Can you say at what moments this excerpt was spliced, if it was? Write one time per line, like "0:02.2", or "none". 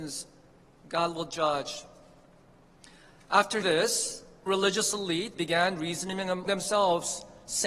0:03.6
0:04.5
0:05.4
0:06.5